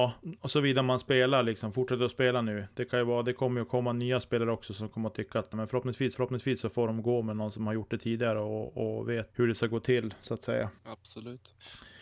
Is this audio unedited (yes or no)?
no